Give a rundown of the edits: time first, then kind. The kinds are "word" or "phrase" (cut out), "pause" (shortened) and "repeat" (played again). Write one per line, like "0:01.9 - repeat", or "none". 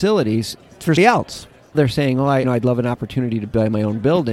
0:01.0 - word
0:01.7 - word
0:02.4 - word